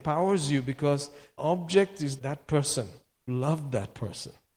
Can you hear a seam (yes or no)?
yes